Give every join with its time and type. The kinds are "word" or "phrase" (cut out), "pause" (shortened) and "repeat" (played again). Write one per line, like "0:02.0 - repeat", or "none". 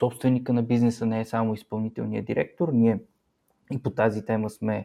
none